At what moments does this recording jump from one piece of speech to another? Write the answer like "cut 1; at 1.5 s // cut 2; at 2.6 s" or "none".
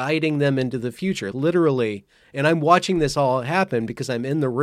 cut 1; at 1.3 s